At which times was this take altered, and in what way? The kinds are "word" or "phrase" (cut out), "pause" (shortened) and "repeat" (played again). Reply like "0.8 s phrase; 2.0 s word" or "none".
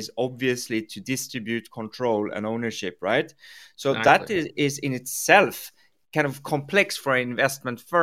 4.5 s word